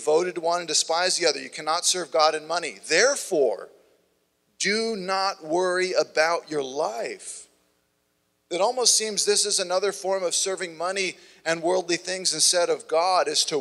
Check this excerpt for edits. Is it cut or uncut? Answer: uncut